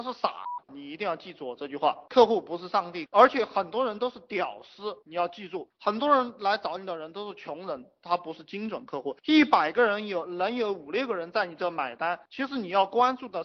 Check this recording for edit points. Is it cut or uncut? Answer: cut